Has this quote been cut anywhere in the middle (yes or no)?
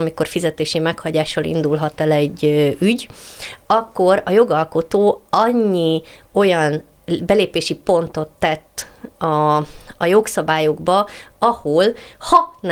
no